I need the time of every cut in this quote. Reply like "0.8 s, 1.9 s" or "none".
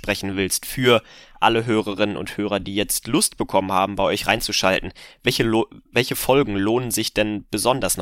none